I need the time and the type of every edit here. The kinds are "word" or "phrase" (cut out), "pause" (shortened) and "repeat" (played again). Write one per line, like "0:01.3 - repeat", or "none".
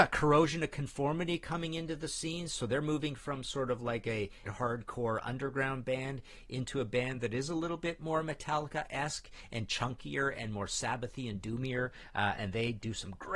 0:04.5 - phrase